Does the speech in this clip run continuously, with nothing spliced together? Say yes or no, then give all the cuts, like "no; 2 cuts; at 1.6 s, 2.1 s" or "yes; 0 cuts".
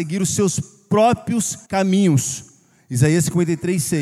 no; 1 cut; at 1.7 s